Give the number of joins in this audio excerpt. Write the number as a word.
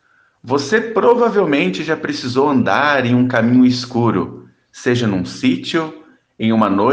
zero